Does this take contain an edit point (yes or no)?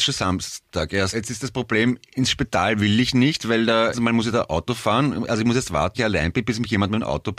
yes